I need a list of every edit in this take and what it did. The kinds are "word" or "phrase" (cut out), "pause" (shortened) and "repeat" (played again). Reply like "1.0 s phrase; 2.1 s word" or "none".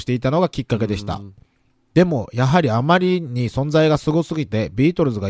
none